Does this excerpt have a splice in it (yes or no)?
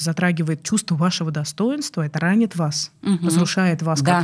no